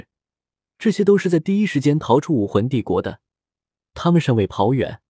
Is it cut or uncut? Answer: uncut